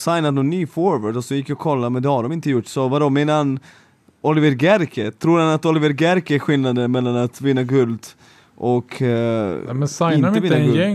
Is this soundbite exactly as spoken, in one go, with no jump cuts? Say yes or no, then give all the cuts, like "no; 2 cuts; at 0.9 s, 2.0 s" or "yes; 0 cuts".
yes; 0 cuts